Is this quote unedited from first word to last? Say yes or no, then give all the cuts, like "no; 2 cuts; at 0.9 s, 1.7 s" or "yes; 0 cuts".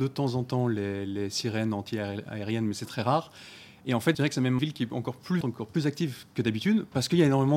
no; 3 cuts; at 4.1 s, 4.6 s, 5.4 s